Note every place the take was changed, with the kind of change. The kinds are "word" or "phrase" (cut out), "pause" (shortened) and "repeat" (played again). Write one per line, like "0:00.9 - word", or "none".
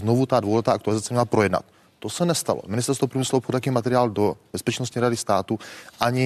none